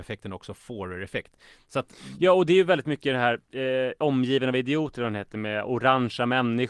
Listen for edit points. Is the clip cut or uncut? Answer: uncut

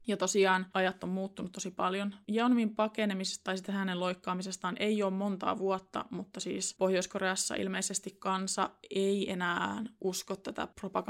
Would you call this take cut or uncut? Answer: uncut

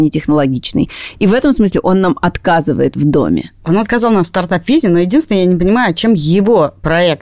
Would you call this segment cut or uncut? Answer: uncut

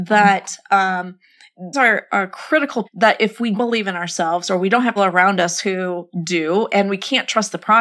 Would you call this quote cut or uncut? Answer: cut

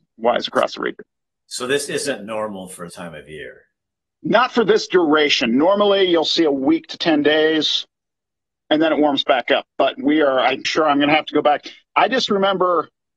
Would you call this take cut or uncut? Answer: cut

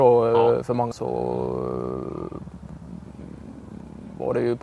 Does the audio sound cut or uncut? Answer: cut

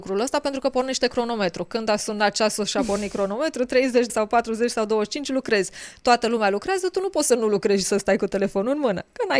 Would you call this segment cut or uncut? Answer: cut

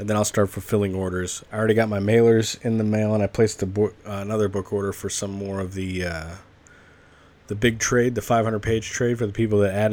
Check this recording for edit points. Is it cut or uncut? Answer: uncut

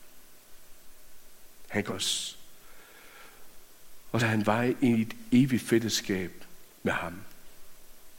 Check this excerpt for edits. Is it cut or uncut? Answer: cut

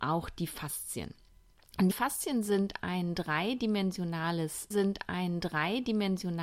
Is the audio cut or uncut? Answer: cut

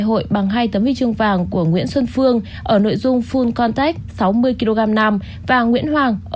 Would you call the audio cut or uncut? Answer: uncut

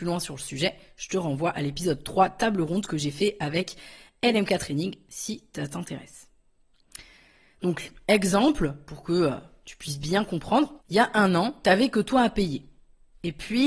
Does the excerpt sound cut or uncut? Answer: cut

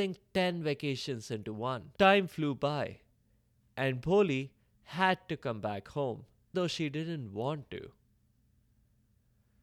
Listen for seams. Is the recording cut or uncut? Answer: cut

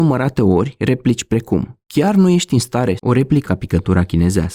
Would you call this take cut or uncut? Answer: cut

